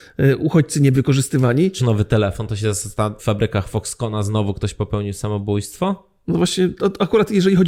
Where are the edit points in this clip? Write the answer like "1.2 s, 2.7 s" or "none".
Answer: 0.9 s, 1.8 s, 3.2 s